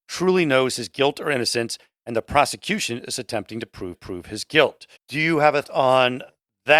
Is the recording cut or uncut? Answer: cut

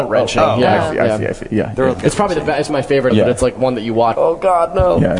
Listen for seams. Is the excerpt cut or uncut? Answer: cut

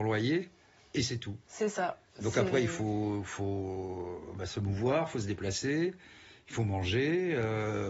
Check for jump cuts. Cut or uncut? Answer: uncut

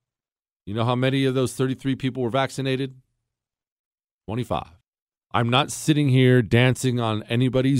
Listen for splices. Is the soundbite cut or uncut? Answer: cut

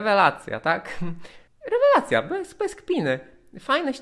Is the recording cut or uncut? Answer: cut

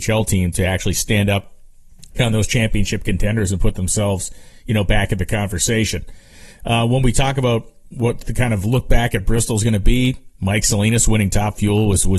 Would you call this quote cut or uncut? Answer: cut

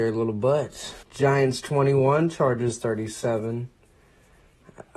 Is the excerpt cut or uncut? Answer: cut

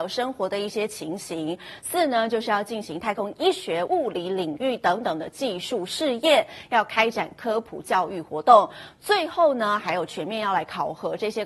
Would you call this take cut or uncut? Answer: cut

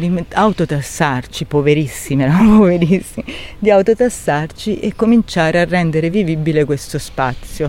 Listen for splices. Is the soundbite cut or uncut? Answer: uncut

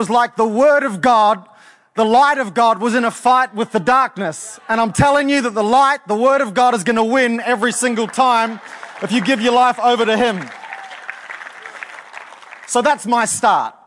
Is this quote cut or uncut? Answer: uncut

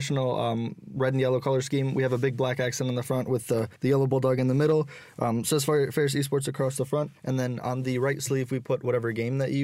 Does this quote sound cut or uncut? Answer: cut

